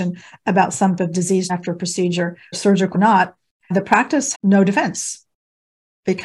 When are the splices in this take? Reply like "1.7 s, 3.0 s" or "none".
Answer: 1.0 s, 1.5 s, 2.5 s, 2.9 s, 3.7 s, 4.3 s